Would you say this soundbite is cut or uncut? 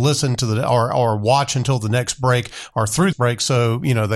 cut